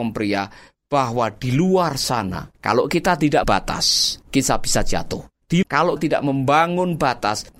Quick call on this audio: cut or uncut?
cut